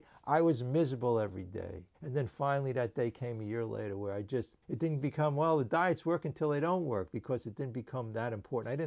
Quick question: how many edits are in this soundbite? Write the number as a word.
two